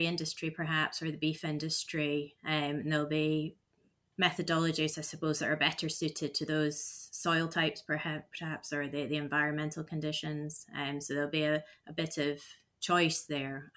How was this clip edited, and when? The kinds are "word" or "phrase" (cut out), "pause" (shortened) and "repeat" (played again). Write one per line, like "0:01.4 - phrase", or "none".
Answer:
none